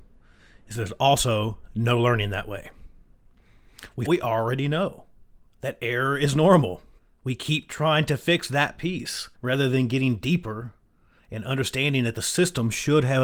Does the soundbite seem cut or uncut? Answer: cut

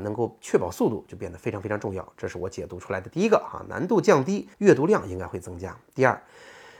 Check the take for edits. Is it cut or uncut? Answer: cut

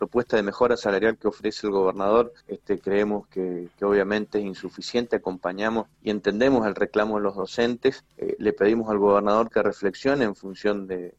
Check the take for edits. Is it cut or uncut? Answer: cut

